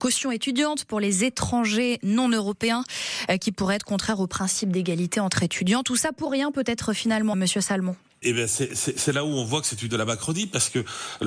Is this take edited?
yes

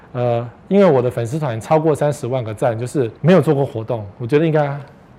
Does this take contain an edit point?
yes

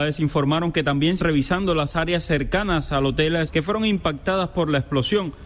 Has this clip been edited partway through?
yes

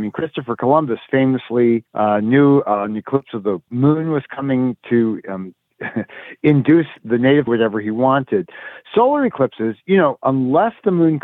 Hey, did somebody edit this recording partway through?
yes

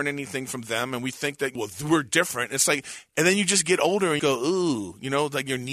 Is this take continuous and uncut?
no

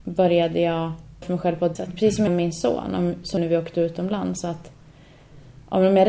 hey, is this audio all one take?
no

